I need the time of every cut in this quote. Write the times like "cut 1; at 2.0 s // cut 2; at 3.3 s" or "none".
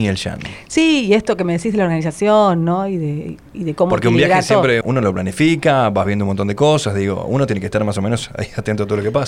cut 1; at 4.8 s